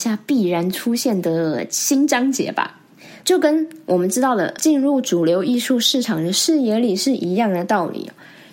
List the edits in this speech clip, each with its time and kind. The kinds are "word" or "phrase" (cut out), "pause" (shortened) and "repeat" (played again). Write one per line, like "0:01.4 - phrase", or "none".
0:04.6 - word